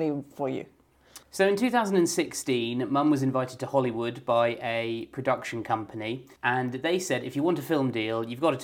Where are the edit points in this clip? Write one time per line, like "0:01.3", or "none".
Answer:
0:01.2
0:06.4

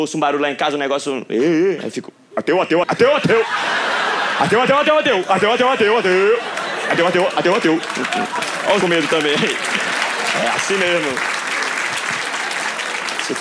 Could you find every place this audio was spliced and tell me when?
0:02.8
0:08.8

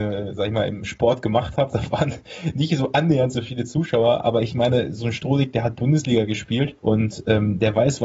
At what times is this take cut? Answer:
0:06.8

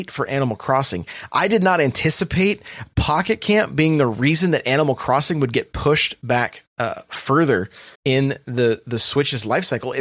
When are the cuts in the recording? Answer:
0:06.7
0:07.9

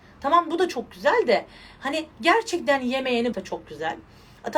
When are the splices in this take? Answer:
0:02.1
0:03.3

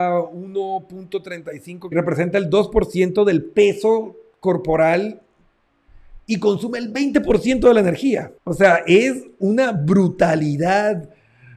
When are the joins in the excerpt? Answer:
0:01.9
0:08.4

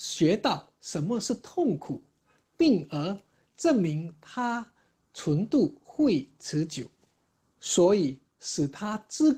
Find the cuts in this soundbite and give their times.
none

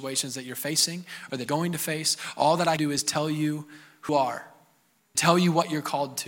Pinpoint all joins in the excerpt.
0:01.5
0:02.8
0:04.1
0:05.1

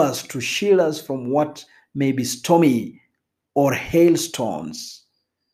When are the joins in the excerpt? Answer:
none

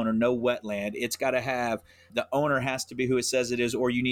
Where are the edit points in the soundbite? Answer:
none

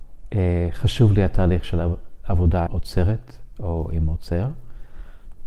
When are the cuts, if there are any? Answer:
0:02.7

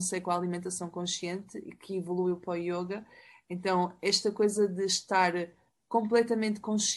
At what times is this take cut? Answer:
none

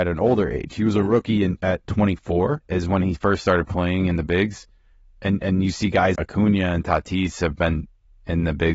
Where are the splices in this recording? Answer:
0:06.1

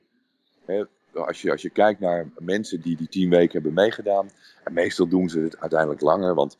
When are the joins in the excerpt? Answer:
0:02.8

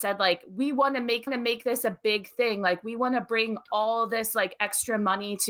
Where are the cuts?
0:01.3

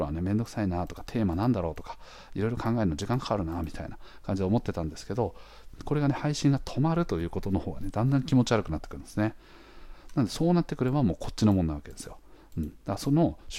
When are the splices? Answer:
none

